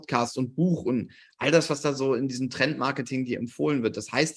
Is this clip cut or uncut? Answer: uncut